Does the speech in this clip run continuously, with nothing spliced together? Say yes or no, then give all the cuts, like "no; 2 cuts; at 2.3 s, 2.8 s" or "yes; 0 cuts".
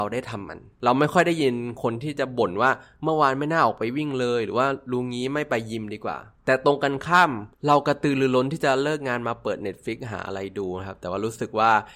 no; 1 cut; at 7.5 s